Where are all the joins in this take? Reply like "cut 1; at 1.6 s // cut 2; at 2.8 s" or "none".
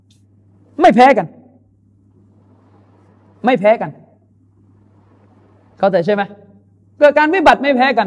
none